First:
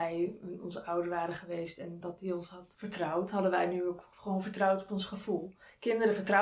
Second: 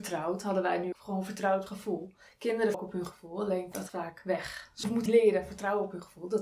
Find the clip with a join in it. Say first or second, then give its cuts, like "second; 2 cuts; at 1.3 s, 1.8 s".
second; 5 cuts; at 0.9 s, 1.7 s, 2.7 s, 3.9 s, 5.1 s